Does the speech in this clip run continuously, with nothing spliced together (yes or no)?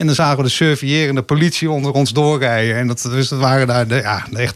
yes